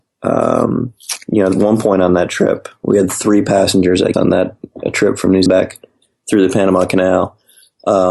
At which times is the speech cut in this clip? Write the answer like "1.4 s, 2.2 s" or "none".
4.1 s, 5.5 s